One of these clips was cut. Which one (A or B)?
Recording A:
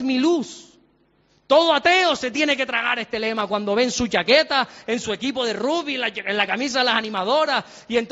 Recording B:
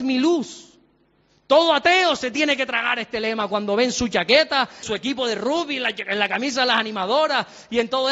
B